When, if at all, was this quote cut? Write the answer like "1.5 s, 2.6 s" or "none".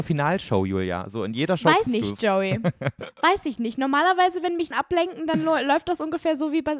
1.9 s, 4.7 s